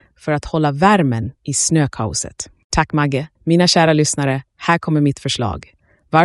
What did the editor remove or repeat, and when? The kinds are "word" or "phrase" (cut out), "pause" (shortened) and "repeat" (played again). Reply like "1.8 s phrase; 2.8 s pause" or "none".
3.4 s pause